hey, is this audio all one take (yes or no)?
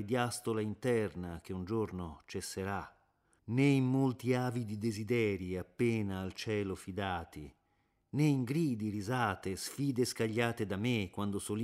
yes